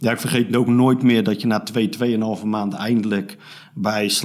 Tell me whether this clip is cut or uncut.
uncut